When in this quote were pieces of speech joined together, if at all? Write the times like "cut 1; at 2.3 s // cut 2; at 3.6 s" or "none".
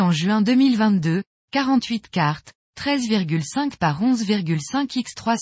none